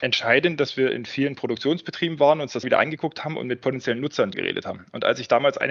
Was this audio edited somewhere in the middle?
yes; 2 cuts; at 2.6 s, 4.3 s

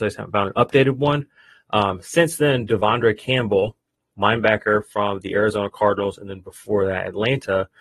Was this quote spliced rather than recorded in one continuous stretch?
no; 0 cuts

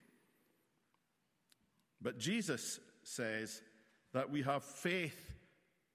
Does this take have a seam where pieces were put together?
no; 0 cuts

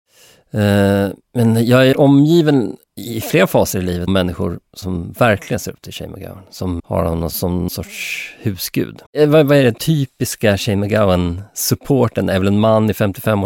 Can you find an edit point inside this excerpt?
yes; 9 cuts; at 1.2 s, 1.9 s, 2.8 s, 4.1 s, 4.7 s, 6.8 s, 7.3 s, 7.7 s, 9.1 s

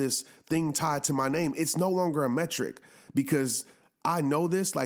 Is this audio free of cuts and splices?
yes; 0 cuts

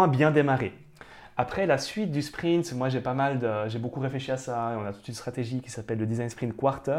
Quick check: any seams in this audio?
no; 0 cuts

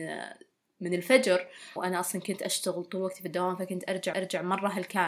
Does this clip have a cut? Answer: yes; 2 cuts; at 1.8 s, 4.1 s

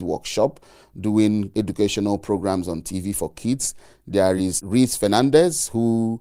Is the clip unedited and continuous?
yes; 0 cuts

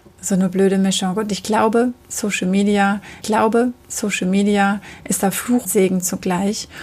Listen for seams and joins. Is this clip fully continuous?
no; 2 cuts; at 3.2 s, 5.6 s

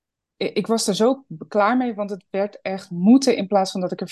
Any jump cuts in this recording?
no; 0 cuts

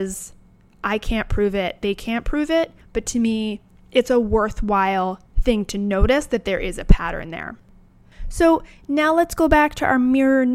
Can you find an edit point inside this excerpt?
no; 0 cuts

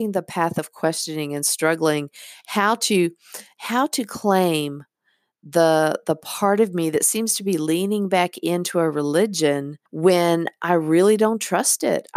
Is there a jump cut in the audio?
yes; 1 cut; at 9.9 s

